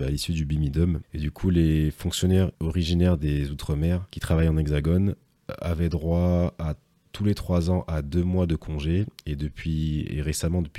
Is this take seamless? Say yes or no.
yes